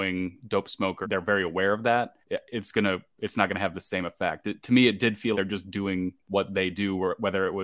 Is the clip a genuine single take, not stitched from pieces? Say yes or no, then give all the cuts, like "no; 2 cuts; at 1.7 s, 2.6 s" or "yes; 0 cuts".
no; 3 cuts; at 1.0 s, 2.2 s, 5.3 s